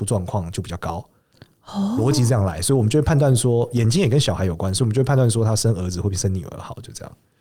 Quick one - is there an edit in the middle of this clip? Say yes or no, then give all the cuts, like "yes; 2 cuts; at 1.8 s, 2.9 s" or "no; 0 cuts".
no; 0 cuts